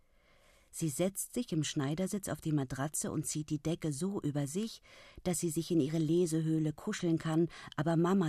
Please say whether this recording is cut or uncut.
uncut